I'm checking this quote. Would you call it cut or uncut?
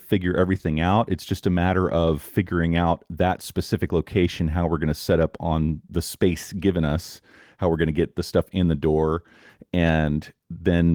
uncut